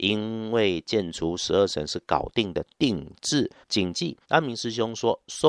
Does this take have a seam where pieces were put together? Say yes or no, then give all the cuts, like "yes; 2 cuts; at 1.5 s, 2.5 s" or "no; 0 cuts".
yes; 2 cuts; at 3.6 s, 4.2 s